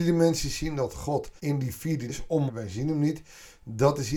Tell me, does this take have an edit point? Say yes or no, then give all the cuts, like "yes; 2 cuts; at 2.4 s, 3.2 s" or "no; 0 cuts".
yes; 3 cuts; at 1.4 s, 2.1 s, 2.5 s